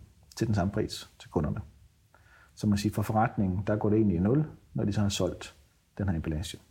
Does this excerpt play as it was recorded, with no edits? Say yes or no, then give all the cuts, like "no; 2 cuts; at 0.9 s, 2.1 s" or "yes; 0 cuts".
yes; 0 cuts